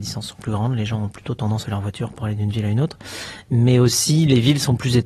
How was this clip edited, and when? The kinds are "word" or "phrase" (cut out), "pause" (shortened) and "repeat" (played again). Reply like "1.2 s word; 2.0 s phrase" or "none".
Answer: 1.6 s phrase